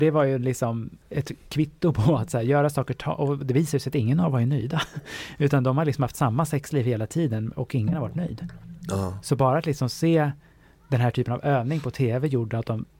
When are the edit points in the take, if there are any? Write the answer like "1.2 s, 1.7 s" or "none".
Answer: none